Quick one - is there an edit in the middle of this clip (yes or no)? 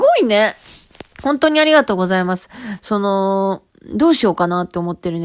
yes